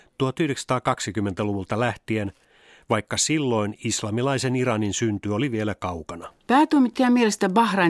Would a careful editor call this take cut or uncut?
uncut